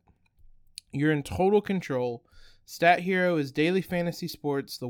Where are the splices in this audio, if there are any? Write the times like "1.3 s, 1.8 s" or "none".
none